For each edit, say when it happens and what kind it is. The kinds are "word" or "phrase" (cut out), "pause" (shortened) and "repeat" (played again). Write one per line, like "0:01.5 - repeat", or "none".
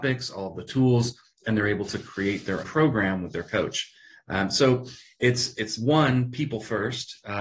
0:02.6 - word